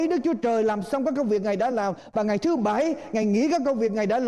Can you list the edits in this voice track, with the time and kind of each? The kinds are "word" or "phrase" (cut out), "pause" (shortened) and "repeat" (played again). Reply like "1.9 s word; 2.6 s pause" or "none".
none

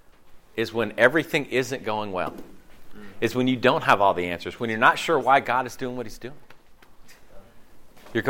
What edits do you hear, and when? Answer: none

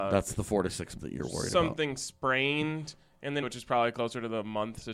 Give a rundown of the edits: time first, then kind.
1.0 s word; 3.4 s word

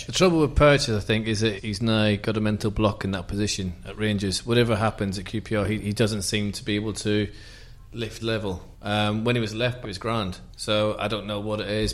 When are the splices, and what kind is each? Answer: 1.6 s word; 8.2 s word; 8.7 s pause; 9.8 s word; 10.5 s pause

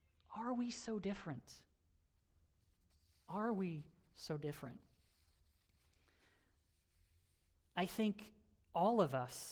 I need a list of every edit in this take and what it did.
none

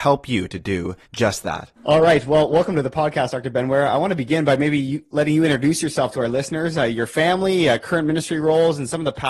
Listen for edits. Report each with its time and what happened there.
1.1 s pause; 1.8 s pause

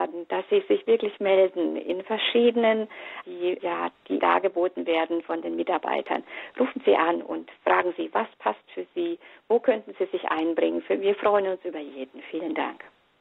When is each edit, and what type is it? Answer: 3.2 s word; 3.6 s word; 4.2 s word

